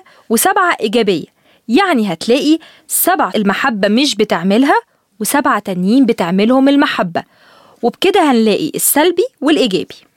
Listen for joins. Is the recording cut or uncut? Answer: cut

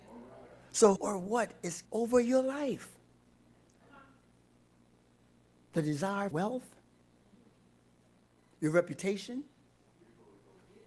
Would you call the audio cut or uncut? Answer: cut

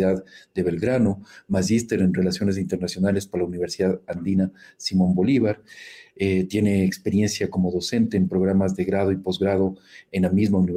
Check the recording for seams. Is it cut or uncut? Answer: uncut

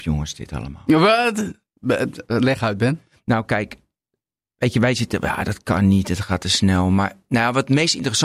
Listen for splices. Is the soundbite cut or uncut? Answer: uncut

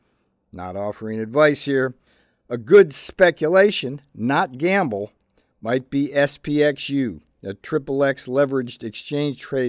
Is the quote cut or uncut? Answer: uncut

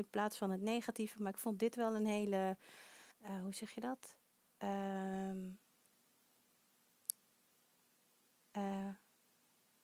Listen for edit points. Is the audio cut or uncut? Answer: cut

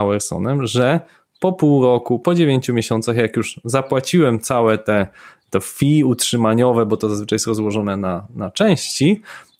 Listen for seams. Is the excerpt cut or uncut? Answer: uncut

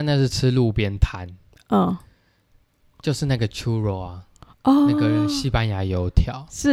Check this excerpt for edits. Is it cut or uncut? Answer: uncut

